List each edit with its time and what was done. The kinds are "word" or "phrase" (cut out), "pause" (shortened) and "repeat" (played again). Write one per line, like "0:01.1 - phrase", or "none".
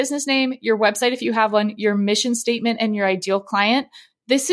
none